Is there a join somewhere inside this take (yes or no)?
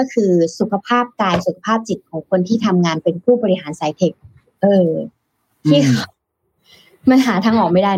no